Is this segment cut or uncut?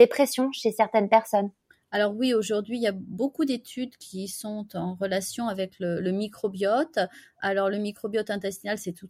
uncut